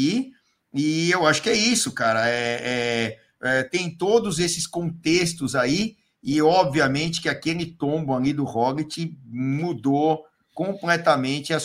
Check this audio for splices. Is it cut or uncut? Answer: uncut